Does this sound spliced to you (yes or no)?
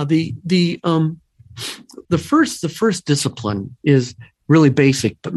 yes